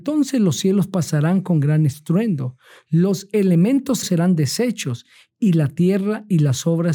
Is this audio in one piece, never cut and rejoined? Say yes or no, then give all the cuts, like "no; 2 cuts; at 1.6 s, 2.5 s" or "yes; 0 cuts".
no; 1 cut; at 4.0 s